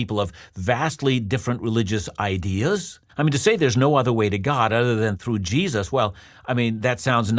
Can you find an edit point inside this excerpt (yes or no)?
yes